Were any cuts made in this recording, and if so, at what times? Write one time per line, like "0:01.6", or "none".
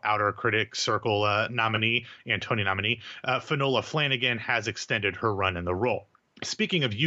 0:06.1